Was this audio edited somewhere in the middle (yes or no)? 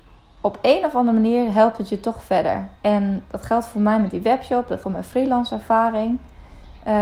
yes